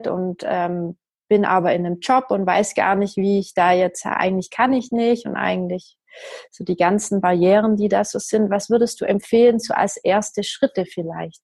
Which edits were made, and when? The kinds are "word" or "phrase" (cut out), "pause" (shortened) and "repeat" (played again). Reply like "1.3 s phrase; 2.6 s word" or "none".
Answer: none